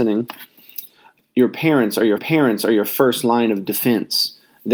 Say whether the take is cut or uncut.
cut